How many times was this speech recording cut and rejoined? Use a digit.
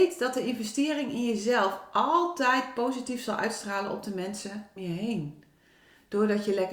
1